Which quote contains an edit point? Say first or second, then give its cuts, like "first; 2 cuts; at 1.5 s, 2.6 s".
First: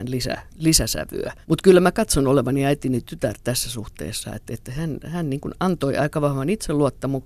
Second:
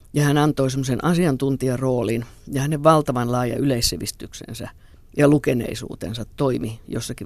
first; 1 cut; at 1.4 s